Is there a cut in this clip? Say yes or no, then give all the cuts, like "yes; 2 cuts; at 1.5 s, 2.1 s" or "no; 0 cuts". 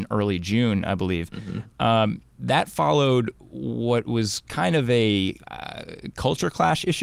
yes; 1 cut; at 5.4 s